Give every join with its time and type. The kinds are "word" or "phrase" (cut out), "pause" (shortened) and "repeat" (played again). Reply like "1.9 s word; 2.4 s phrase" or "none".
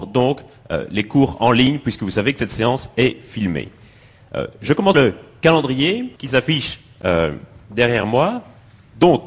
4.9 s phrase; 6.2 s pause